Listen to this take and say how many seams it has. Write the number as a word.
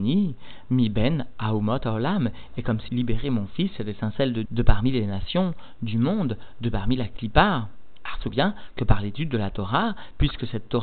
three